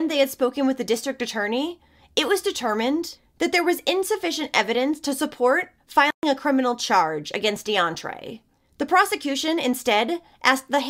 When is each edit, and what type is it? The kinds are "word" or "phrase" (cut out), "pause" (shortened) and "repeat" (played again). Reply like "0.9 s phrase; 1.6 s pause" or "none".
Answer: none